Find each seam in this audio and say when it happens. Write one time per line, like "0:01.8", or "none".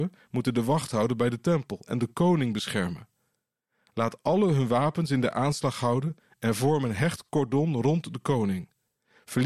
none